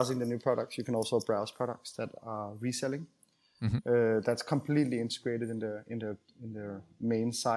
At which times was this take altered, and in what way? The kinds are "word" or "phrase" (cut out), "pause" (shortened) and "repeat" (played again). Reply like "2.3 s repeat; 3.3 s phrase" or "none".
none